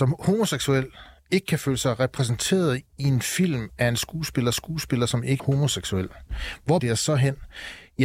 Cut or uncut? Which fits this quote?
cut